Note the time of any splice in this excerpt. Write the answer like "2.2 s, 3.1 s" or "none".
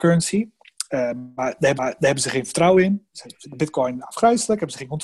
1.7 s